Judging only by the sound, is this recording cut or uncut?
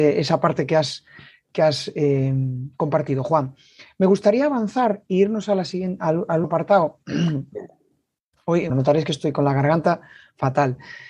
cut